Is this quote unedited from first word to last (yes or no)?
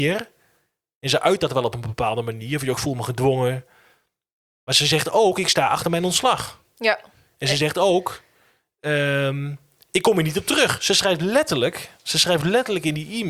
yes